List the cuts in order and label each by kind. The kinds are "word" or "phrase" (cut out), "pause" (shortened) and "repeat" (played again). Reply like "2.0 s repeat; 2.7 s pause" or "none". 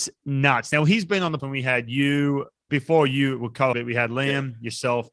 1.4 s word; 2.7 s word; 3.7 s word